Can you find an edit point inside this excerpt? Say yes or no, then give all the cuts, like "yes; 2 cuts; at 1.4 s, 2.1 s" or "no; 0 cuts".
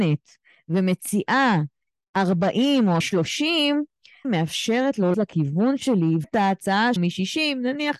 yes; 5 cuts; at 3.0 s, 4.2 s, 5.1 s, 6.2 s, 7.0 s